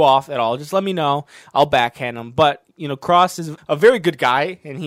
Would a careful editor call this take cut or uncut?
cut